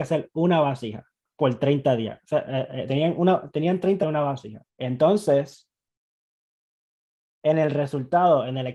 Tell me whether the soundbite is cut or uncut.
cut